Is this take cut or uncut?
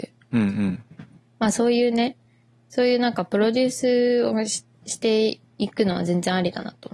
uncut